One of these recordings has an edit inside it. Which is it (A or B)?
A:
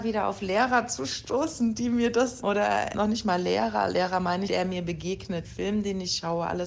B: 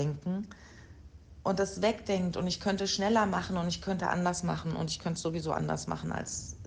A